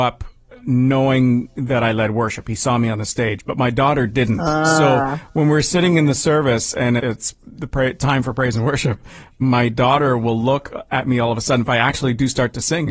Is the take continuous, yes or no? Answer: no